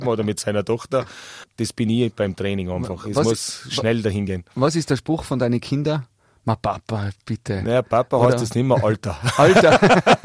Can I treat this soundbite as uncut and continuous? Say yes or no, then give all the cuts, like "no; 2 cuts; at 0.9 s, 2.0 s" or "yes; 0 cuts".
yes; 0 cuts